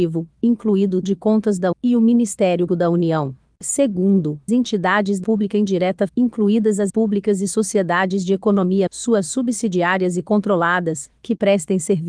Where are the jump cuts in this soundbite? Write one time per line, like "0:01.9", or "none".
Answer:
0:01.0
0:01.7
0:02.7
0:04.5
0:05.2
0:06.1
0:06.9
0:08.9